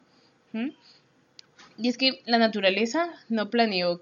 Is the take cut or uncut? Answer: uncut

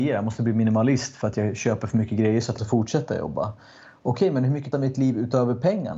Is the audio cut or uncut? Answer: cut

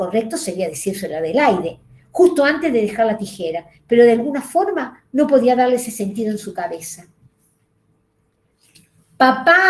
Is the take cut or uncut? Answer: uncut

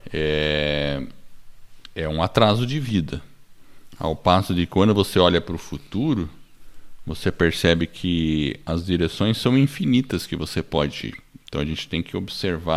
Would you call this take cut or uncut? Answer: uncut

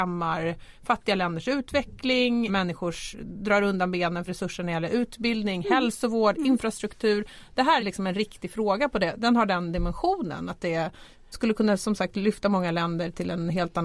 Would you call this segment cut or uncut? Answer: cut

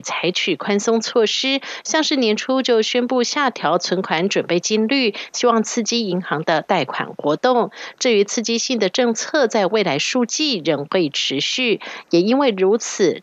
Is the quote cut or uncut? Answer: uncut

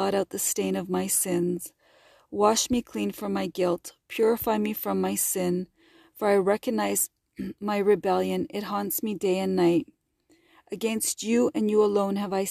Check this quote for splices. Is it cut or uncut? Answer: uncut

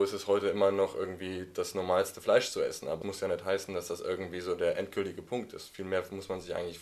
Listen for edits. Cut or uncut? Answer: cut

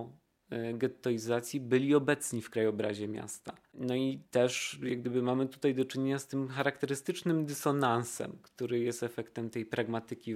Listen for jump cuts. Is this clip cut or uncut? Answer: cut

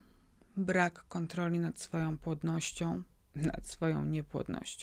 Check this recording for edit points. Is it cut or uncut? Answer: uncut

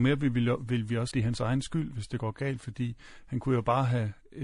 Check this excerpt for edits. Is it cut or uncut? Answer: cut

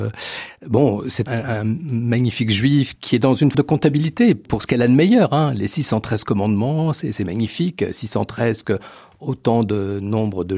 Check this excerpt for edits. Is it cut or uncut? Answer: cut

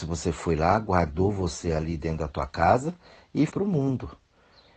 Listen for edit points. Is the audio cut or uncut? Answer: cut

